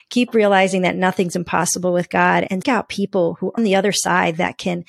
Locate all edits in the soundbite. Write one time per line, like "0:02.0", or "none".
0:02.6
0:03.6